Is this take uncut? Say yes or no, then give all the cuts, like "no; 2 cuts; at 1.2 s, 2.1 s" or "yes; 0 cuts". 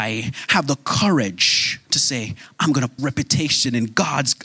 no; 2 cuts; at 1.8 s, 3.0 s